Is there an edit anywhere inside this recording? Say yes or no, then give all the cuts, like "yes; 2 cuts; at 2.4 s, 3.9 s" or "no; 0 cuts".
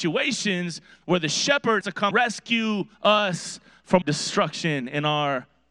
yes; 4 cuts; at 1.8 s, 2.1 s, 2.9 s, 4.0 s